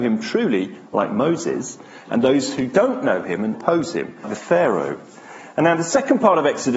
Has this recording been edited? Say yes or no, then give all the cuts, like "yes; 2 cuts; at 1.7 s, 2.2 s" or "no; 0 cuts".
yes; 2 cuts; at 3.5 s, 4.2 s